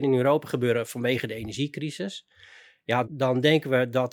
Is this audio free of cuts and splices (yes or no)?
no